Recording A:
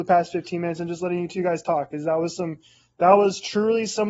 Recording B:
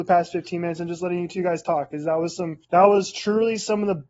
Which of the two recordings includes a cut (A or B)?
B